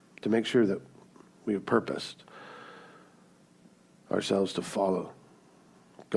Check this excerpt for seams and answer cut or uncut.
uncut